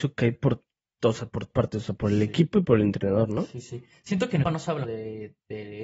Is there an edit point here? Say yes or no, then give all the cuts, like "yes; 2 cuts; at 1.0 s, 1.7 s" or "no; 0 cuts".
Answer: yes; 3 cuts; at 1.5 s, 4.4 s, 4.8 s